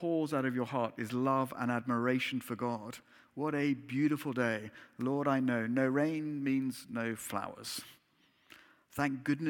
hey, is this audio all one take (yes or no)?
yes